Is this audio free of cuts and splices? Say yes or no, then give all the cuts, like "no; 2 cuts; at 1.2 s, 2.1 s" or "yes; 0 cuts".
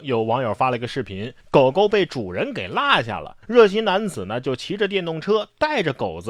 no; 2 cuts; at 1.4 s, 3.4 s